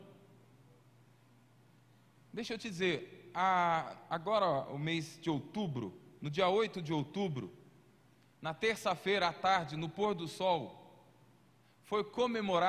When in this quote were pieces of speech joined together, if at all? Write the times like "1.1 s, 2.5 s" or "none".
none